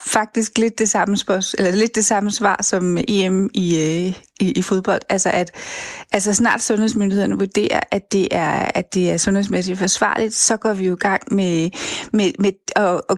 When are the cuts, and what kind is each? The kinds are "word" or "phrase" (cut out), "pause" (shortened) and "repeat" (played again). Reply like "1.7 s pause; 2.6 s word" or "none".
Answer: none